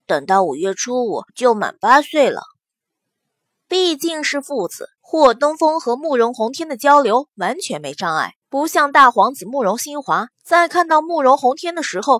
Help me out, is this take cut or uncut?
cut